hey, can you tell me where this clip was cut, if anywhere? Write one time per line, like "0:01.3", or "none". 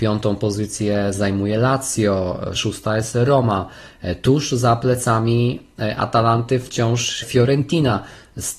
0:02.6
0:07.2